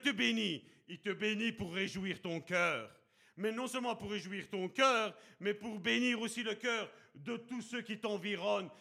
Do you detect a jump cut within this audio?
no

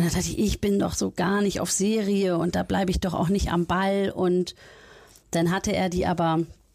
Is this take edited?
no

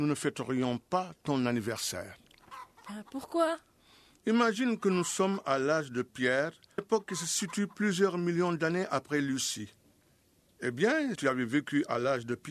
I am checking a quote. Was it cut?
yes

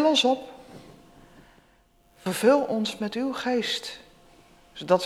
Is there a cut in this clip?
no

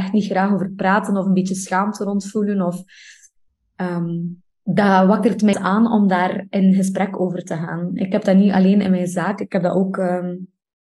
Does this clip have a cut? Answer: yes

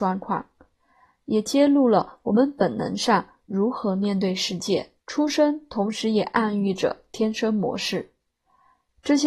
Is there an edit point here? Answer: yes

